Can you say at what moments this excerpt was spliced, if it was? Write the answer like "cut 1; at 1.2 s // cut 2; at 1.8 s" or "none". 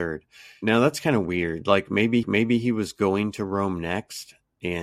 cut 1; at 2.2 s